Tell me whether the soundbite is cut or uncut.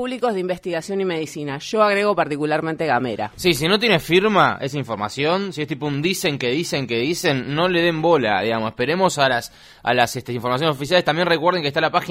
uncut